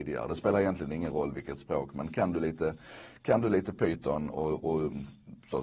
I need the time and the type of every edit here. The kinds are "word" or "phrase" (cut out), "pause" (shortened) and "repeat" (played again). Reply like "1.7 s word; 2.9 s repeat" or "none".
none